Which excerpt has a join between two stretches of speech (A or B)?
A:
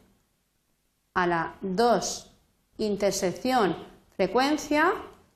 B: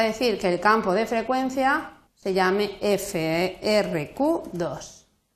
B